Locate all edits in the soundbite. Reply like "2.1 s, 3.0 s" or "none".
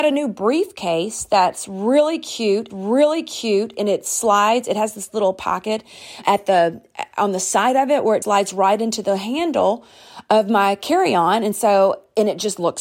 2.7 s, 6.2 s, 8.2 s